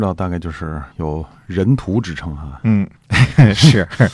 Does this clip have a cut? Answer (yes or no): yes